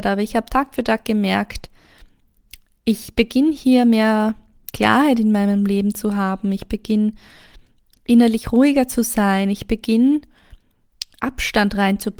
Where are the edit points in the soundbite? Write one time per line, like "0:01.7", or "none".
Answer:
none

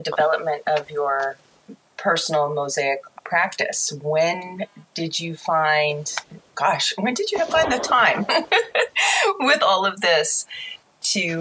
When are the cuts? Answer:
0:03.2

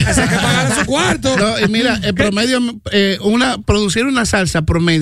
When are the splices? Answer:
none

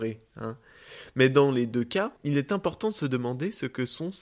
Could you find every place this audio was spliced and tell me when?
0:02.2

